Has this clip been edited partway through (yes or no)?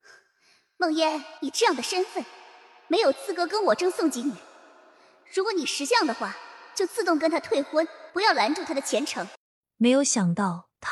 yes